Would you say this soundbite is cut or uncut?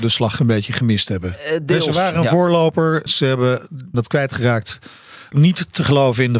cut